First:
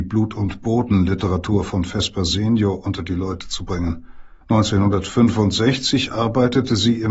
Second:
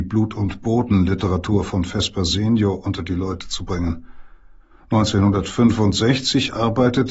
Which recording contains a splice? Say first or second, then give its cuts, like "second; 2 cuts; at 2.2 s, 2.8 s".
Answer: first; 1 cut; at 4.4 s